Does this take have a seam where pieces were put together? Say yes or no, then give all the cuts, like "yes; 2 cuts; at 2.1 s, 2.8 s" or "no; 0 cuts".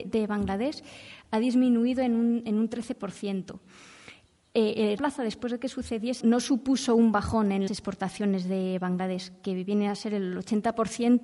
yes; 3 cuts; at 5.0 s, 6.2 s, 7.7 s